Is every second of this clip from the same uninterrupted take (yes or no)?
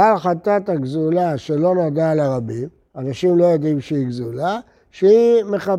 yes